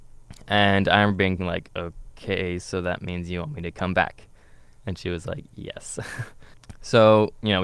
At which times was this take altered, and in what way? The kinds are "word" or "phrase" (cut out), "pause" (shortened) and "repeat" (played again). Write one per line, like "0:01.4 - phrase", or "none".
none